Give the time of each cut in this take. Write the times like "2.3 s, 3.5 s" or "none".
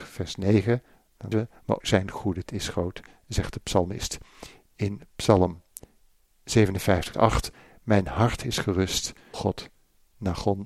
1.3 s, 1.8 s, 2.5 s, 7.1 s, 9.3 s